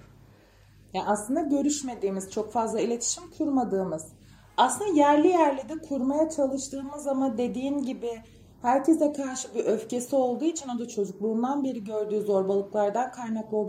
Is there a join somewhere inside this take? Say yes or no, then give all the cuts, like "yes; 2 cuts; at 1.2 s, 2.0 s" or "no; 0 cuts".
no; 0 cuts